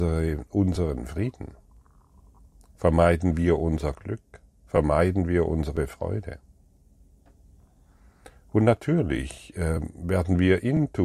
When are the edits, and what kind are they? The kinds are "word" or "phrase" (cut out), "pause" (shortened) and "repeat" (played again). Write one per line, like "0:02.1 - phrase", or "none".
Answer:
none